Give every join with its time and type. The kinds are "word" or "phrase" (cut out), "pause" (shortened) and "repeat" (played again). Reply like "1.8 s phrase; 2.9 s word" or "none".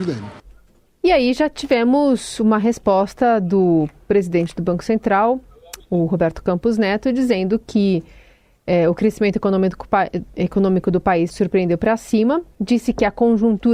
11.3 s word

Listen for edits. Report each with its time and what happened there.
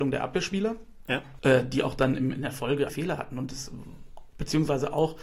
2.9 s phrase

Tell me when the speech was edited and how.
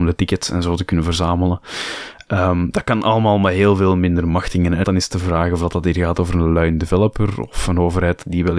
4.8 s word

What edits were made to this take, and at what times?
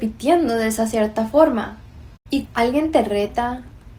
2.5 s word

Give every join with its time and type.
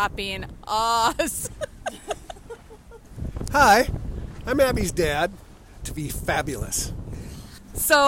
5.8 s phrase

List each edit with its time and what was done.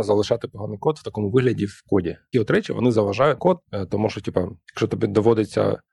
2.3 s word; 3.4 s phrase

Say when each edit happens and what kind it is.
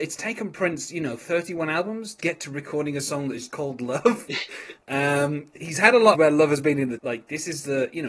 2.2 s word; 3.5 s word; 5.6 s phrase; 6.1 s phrase; 7.0 s phrase

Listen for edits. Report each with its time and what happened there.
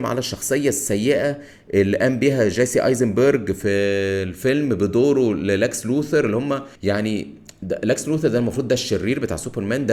6.8 s pause

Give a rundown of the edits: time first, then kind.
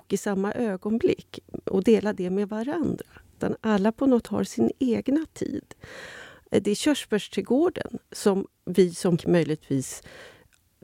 4.2 s word; 9.2 s word

